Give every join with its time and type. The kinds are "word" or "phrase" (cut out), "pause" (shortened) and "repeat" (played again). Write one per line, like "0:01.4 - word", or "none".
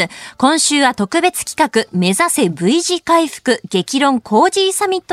none